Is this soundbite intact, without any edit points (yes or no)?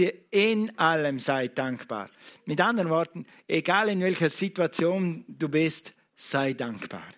yes